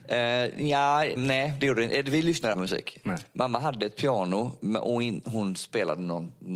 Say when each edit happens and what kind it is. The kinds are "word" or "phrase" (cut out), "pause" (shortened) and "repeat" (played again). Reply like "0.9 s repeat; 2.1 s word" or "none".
1.2 s phrase; 2.5 s word